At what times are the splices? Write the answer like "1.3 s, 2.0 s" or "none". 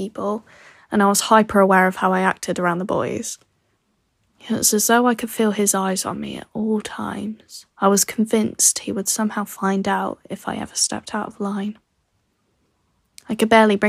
7.7 s